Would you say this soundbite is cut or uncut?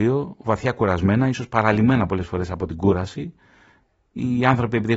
uncut